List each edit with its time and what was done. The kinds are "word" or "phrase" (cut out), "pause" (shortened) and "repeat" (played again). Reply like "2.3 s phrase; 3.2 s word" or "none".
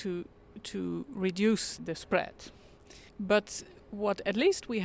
1.8 s word; 3.1 s pause